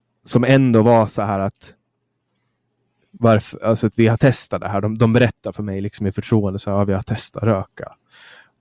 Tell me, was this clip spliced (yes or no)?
no